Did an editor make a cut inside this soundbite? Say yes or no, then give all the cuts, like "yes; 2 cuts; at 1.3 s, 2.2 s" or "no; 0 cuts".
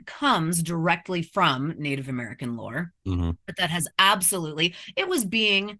yes; 1 cut; at 3.4 s